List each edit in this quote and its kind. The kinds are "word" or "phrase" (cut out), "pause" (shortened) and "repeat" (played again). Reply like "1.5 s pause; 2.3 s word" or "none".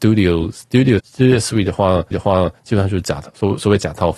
1.0 s word; 2.1 s repeat